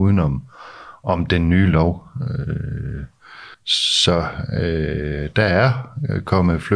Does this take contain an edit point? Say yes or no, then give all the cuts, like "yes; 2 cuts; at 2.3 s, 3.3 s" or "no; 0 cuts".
yes; 1 cut; at 3.5 s